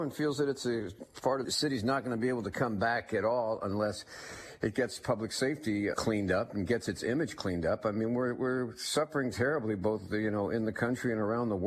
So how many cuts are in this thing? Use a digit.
2